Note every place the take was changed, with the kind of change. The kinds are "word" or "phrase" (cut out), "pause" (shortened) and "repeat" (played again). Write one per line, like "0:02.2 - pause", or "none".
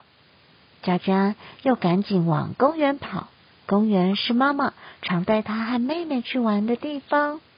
0:03.5 - pause